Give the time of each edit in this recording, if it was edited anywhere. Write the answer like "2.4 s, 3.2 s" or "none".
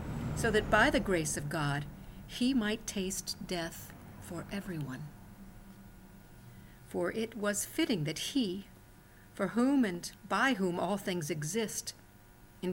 none